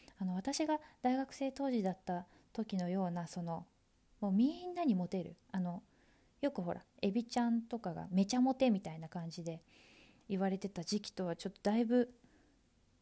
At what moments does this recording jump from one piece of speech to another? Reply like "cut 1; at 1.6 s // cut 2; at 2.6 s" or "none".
none

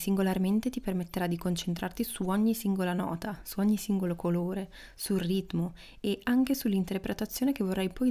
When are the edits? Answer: none

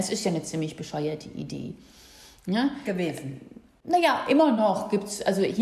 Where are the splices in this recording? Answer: none

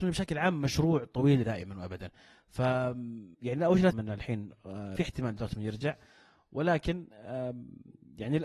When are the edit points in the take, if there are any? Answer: cut 1; at 1.4 s // cut 2; at 3.3 s // cut 3; at 3.9 s // cut 4; at 5.0 s

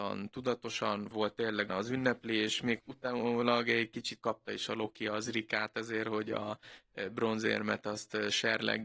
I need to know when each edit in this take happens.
cut 1; at 1.1 s // cut 2; at 1.7 s // cut 3; at 2.8 s // cut 4; at 4.2 s

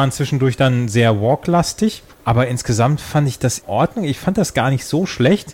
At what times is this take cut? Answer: cut 1; at 2.1 s // cut 2; at 3.6 s

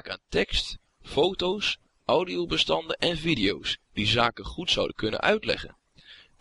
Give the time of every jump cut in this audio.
none

